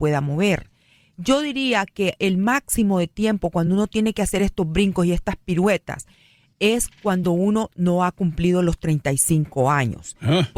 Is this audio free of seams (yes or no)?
yes